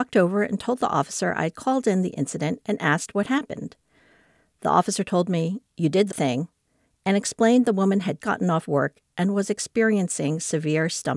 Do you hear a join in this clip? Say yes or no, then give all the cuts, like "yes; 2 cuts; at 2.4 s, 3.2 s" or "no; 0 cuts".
yes; 2 cuts; at 6.1 s, 8.2 s